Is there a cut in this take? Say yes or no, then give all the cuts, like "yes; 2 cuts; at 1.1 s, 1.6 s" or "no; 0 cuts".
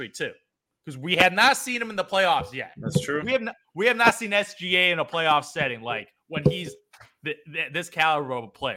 no; 0 cuts